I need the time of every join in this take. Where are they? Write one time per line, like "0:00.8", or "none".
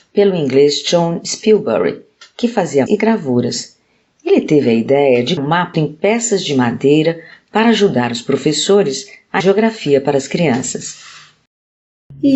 0:02.9
0:05.4
0:05.7
0:09.4